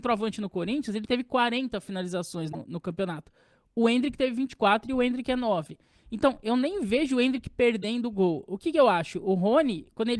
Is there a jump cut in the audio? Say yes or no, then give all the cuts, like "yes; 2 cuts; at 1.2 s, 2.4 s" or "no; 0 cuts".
no; 0 cuts